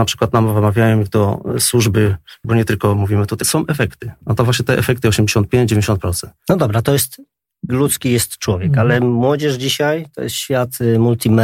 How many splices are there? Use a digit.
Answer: 3